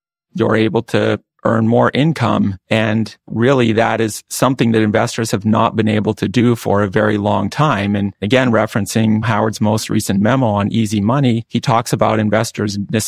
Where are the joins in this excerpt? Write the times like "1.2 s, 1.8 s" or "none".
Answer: 11.5 s